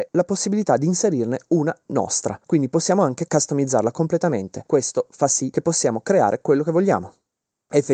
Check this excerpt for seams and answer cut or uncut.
uncut